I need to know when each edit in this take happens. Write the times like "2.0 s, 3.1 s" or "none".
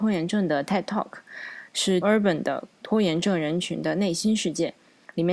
2.0 s